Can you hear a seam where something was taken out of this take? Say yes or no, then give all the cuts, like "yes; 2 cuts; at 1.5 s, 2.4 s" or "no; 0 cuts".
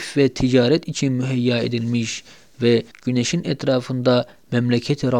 yes; 1 cut; at 2.9 s